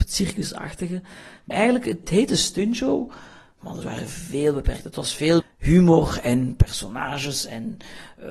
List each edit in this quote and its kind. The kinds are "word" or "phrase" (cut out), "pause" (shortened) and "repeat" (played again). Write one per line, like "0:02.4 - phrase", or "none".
0:01.5 - word
0:02.0 - word
0:03.8 - word
0:05.4 - word